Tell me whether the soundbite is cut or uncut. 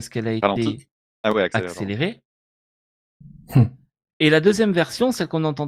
uncut